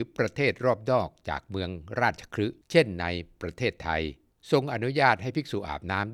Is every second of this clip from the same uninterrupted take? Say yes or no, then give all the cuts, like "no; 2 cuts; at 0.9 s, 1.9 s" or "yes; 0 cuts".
no; 2 cuts; at 2.6 s, 4.3 s